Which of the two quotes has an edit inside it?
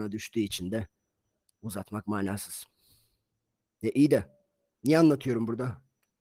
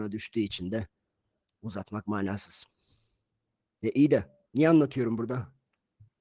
second; 1 cut; at 4.4 s

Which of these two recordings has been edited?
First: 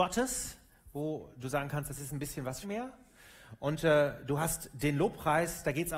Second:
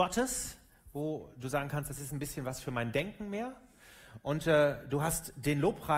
first; 1 cut; at 2.6 s

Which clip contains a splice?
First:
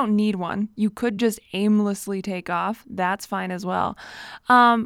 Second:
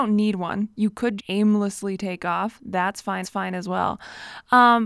second; 2 cuts; at 1.2 s, 3.2 s

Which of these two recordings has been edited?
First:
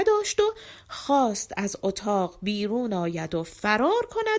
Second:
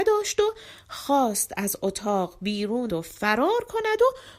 second; 1 cut; at 2.9 s

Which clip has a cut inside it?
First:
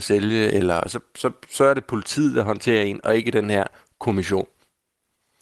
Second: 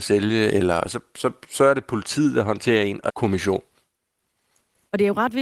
second; 1 cut; at 3.1 s

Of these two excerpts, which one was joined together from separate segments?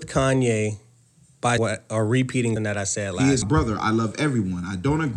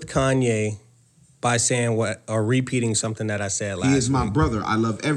first; 3 cuts; at 1.6 s, 2.6 s, 3.4 s

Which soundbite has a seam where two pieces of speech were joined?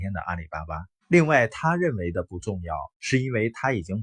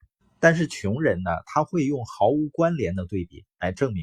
first; 2 cuts; at 1.0 s, 2.9 s

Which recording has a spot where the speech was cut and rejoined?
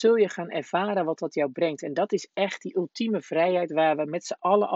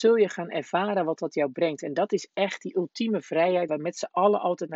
second; 1 cut; at 3.7 s

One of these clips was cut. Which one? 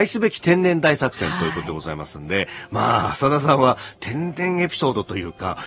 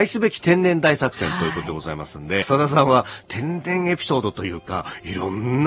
second; 1 cut; at 2.4 s

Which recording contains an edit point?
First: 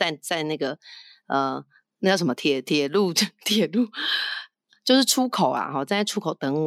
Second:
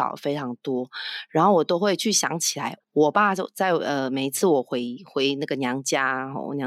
second; 1 cut; at 2.8 s

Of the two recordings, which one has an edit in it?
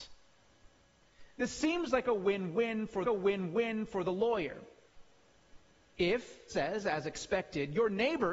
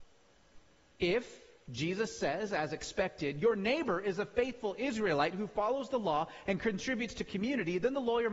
first; 2 cuts; at 3.1 s, 6.5 s

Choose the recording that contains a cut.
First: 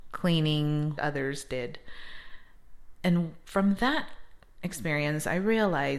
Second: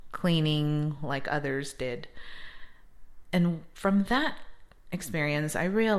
first; 1 cut; at 1.0 s

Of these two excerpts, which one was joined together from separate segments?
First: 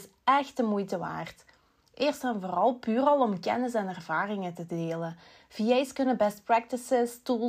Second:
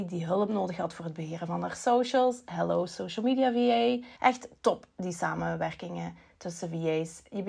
second; 1 cut; at 4.2 s

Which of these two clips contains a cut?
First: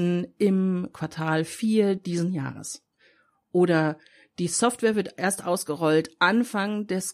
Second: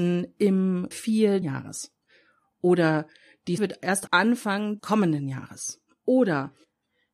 second; 5 cuts; at 0.9 s, 1.4 s, 3.6 s, 4.1 s, 4.8 s

